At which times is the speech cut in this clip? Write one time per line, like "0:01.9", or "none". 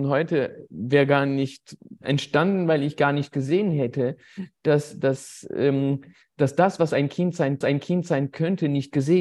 0:02.0
0:07.6